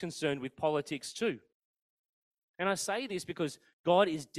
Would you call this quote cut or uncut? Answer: uncut